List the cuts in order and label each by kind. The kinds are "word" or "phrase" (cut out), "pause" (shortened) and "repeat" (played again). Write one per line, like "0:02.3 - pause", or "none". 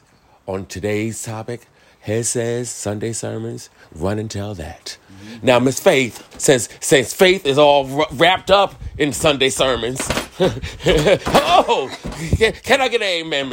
0:06.3 - pause